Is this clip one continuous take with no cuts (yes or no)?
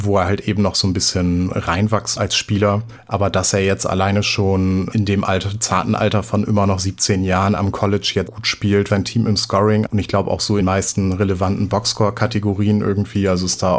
no